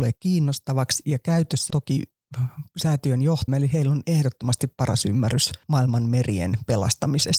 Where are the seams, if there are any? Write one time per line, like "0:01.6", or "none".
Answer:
0:01.7
0:03.5